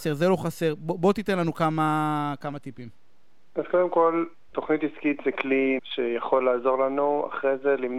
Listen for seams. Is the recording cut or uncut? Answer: cut